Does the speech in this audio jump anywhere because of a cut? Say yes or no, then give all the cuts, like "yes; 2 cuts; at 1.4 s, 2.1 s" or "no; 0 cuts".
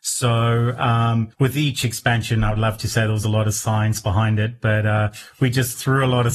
yes; 1 cut; at 1.3 s